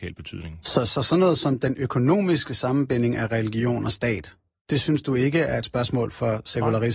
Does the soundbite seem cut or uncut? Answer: uncut